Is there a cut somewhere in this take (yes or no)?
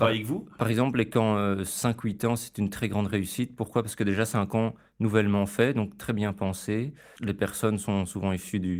no